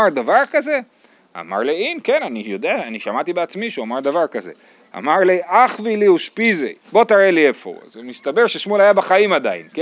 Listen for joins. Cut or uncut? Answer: uncut